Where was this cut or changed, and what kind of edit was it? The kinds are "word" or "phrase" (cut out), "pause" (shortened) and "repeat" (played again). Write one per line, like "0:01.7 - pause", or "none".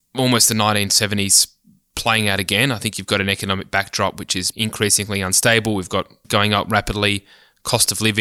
0:04.5 - word
0:06.2 - word